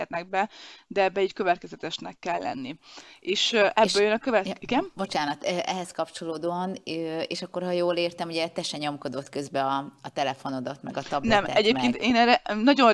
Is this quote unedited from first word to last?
yes; 0 cuts

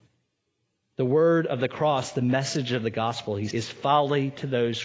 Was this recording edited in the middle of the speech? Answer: yes; 1 cut; at 3.5 s

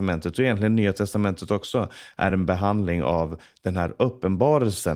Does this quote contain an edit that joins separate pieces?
no; 0 cuts

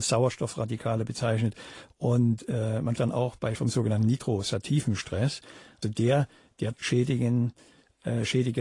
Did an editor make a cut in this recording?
yes; 4 cuts; at 3.0 s, 3.6 s, 5.8 s, 6.7 s

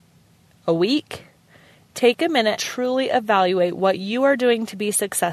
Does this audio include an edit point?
yes; 1 cut; at 2.6 s

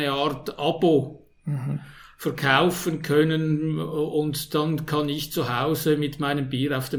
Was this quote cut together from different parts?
no; 0 cuts

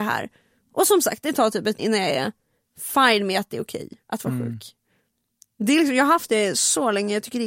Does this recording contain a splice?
yes; 1 cut; at 1.8 s

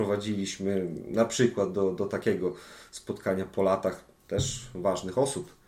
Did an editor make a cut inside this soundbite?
no; 0 cuts

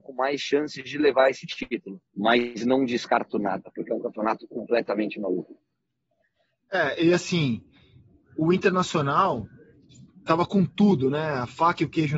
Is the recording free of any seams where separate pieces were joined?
no; 1 cut; at 2.1 s

